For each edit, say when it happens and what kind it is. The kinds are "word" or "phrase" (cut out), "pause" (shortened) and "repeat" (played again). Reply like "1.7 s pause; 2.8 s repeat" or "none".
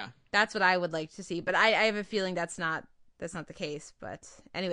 none